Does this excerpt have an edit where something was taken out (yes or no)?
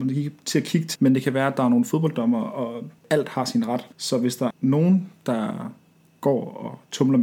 yes